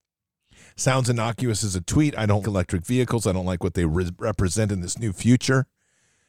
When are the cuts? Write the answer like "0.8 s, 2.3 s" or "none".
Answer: 2.4 s

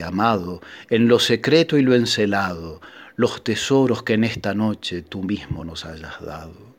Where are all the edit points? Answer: none

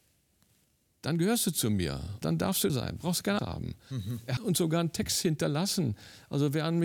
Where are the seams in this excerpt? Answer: 2.2 s, 2.7 s, 3.4 s, 4.4 s

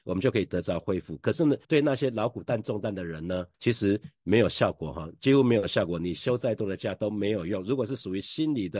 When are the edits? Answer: 1.6 s, 3.5 s

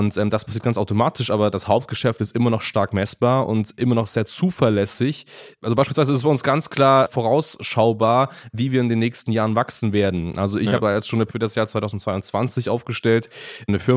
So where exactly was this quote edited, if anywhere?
10.8 s, 11.3 s

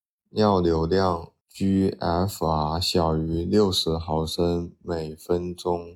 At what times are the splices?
1.4 s

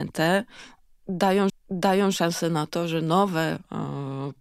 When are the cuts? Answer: 1.5 s

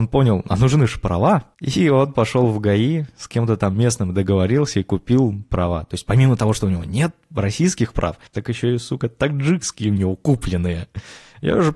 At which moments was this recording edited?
8.3 s

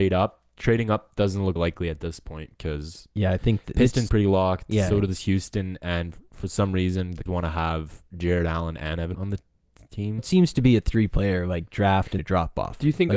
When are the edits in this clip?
1.6 s, 4.1 s, 7.3 s, 9.1 s, 10.2 s, 12.2 s

